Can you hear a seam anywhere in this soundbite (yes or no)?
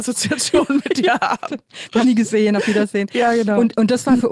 yes